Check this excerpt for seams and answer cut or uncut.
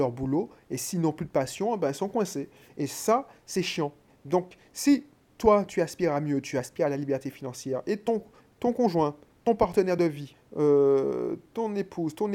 uncut